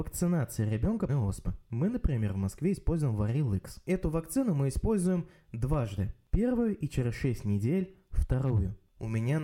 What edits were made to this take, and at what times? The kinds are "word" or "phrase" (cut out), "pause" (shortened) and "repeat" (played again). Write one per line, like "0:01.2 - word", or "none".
0:01.1 - phrase